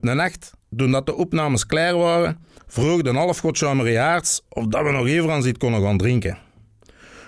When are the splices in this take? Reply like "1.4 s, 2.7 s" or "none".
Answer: 2.6 s